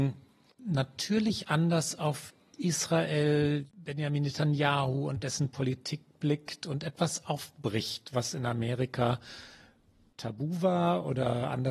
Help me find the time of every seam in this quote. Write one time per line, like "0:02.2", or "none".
none